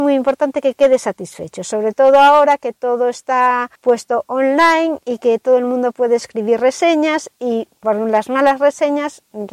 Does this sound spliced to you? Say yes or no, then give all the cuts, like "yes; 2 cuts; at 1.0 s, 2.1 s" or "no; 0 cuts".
yes; 1 cut; at 3.8 s